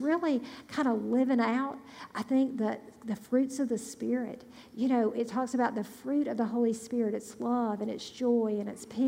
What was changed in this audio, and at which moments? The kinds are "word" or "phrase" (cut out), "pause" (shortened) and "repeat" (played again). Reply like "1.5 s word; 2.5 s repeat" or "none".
none